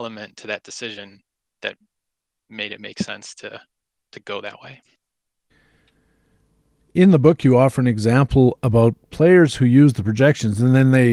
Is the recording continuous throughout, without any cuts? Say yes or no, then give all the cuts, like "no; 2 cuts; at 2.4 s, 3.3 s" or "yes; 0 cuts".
yes; 0 cuts